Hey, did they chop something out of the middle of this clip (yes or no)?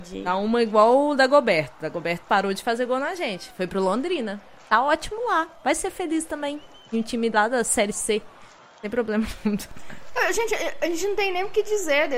no